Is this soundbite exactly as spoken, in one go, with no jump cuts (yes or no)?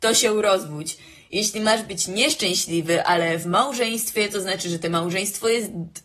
yes